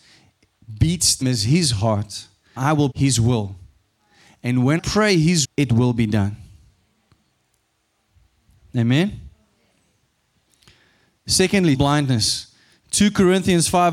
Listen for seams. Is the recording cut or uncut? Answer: cut